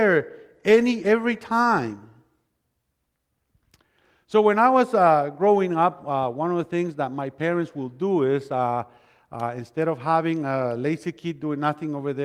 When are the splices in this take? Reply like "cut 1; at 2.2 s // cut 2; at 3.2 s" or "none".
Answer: none